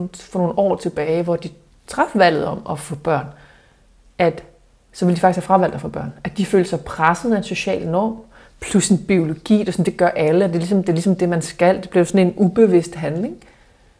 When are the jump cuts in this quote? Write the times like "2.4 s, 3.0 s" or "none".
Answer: none